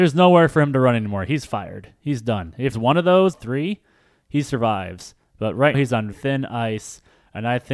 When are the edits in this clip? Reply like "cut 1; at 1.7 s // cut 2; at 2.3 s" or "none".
cut 1; at 2.7 s // cut 2; at 3.3 s // cut 3; at 5.7 s // cut 4; at 6.1 s